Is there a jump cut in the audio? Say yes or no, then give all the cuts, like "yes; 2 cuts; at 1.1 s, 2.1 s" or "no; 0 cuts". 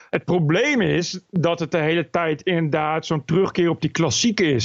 no; 0 cuts